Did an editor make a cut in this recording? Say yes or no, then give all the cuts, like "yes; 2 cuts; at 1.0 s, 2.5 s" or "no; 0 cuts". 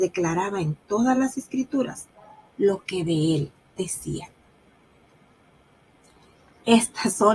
no; 0 cuts